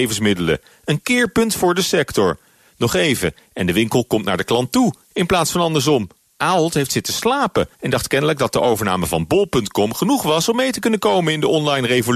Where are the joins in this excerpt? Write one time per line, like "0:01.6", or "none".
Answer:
0:06.2
0:07.7